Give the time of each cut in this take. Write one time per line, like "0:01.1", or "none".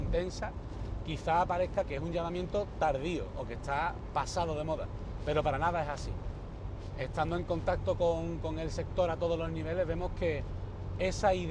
0:01.8